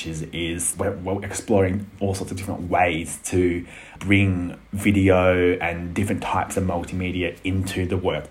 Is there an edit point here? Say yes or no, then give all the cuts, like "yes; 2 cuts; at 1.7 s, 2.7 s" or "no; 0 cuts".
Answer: no; 0 cuts